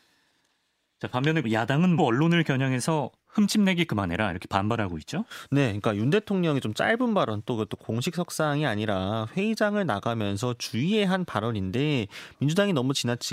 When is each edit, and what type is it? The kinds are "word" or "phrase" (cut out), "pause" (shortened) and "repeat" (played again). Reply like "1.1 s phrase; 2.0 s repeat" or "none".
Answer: 1.4 s word; 2.0 s phrase